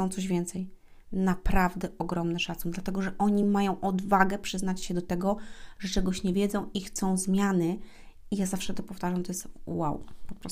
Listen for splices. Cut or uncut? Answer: uncut